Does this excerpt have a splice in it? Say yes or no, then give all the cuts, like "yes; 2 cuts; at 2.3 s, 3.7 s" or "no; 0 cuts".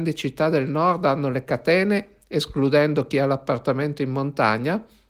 no; 0 cuts